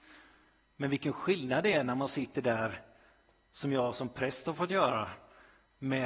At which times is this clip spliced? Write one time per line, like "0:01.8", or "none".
none